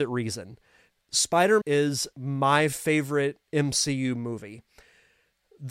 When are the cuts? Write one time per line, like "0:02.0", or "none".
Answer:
0:01.6
0:02.1
0:03.4